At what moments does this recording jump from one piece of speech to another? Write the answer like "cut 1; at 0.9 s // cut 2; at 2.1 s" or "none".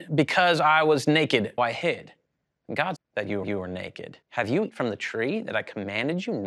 cut 1; at 1.6 s // cut 2; at 2.3 s // cut 3; at 3.0 s // cut 4; at 3.4 s // cut 5; at 4.2 s // cut 6; at 4.7 s